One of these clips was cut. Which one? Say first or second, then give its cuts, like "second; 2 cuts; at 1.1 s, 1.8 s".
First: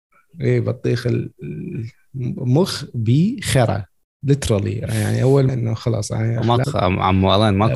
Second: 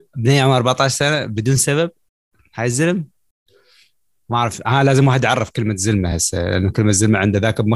first; 2 cuts; at 5.5 s, 6.6 s